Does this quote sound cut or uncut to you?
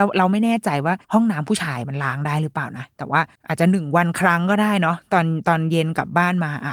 cut